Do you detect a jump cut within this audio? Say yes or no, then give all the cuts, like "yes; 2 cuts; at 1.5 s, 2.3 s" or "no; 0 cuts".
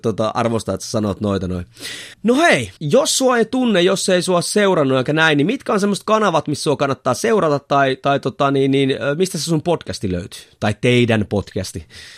yes; 2 cuts; at 2.1 s, 2.8 s